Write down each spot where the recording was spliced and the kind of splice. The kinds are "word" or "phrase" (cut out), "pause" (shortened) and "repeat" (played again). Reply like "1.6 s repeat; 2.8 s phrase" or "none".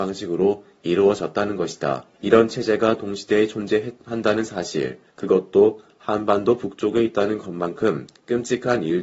2.1 s pause; 5.1 s pause